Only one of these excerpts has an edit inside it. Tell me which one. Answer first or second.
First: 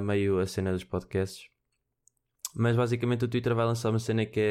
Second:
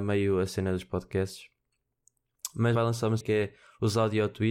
second